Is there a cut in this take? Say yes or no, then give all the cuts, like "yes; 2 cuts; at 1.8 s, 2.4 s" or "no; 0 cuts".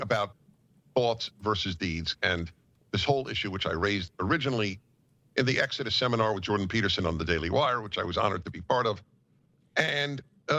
no; 0 cuts